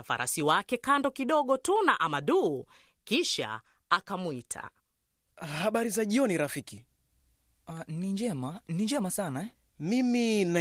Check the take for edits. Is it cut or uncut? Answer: uncut